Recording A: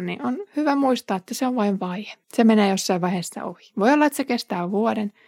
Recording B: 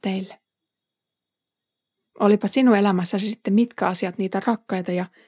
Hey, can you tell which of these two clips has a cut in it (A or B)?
A